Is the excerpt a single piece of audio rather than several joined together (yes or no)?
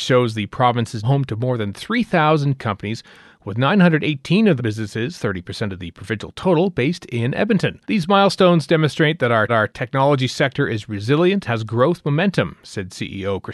no